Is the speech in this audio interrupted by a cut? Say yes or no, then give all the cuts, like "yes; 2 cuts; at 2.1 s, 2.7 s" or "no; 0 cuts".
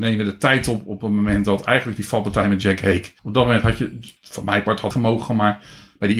yes; 3 cuts; at 3.2 s, 4.2 s, 4.9 s